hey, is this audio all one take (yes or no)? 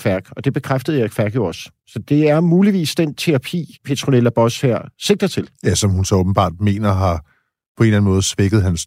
no